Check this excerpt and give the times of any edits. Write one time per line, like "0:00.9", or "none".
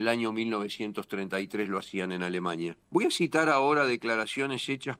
0:02.8